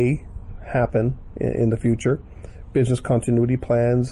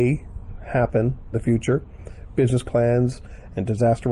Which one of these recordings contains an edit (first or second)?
second